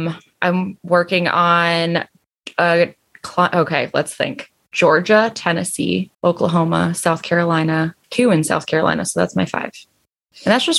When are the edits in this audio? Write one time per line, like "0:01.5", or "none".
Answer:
0:06.1
0:08.0